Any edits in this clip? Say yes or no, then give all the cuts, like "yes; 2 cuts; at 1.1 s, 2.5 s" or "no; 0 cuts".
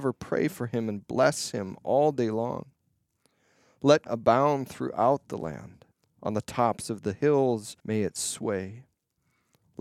yes; 3 cuts; at 4.1 s, 5.9 s, 7.8 s